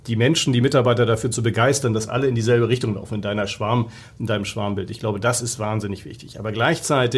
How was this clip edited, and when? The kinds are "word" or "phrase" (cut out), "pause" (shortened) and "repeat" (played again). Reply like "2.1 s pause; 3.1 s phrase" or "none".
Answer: none